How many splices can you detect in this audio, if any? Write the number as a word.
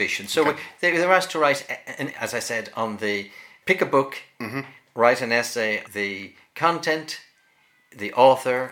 three